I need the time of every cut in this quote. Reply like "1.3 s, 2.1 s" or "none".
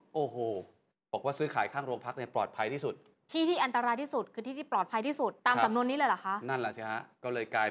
5.4 s